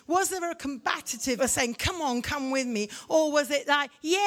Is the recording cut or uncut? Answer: cut